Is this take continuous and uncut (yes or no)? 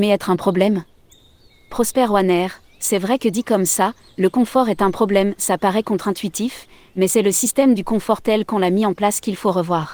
yes